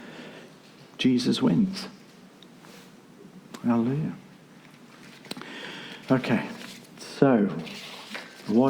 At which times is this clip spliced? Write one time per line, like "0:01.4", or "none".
0:06.0